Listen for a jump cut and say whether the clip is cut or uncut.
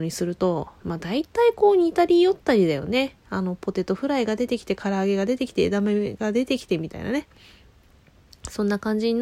uncut